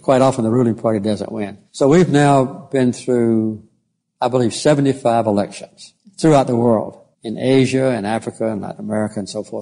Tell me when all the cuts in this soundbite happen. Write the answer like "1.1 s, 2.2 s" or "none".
1.7 s, 6.0 s, 7.1 s